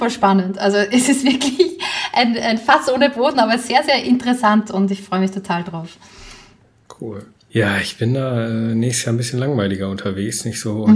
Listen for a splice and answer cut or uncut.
uncut